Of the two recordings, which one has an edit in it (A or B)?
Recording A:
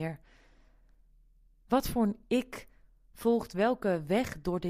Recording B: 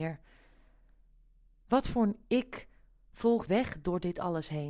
B